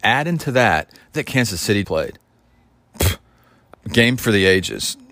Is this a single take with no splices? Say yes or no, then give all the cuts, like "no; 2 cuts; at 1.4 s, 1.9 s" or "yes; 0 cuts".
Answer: no; 3 cuts; at 1.2 s, 1.8 s, 3.7 s